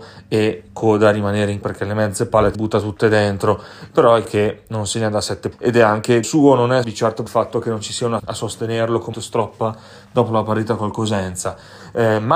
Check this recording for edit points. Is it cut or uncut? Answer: cut